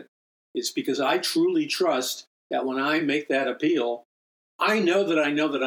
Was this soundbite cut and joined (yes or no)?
no